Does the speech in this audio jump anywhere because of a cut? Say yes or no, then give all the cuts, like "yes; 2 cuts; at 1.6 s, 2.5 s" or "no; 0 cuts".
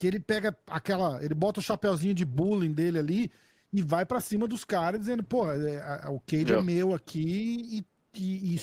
no; 0 cuts